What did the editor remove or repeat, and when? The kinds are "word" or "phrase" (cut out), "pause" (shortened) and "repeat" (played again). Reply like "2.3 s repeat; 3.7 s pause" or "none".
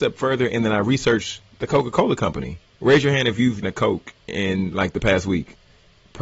2.7 s pause; 3.6 s word; 4.2 s pause